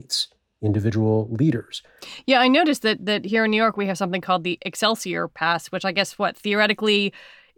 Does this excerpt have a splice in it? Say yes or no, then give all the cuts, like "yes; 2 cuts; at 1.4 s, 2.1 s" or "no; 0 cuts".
no; 0 cuts